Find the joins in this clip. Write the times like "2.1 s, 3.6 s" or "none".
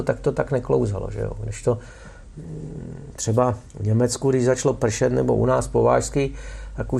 3.7 s